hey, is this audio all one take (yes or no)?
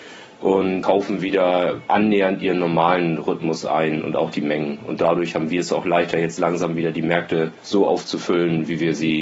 no